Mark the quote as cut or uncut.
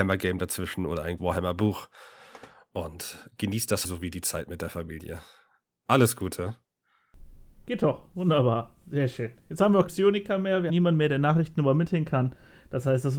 cut